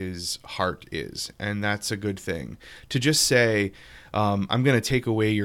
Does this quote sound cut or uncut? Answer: uncut